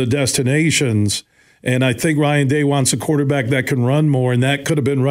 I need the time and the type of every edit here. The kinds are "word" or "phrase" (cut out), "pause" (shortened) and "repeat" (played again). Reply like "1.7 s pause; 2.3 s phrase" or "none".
none